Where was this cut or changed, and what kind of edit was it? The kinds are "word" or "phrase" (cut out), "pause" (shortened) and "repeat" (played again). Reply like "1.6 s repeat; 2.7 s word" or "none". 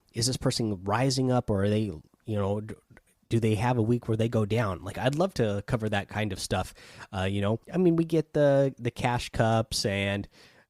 7.6 s pause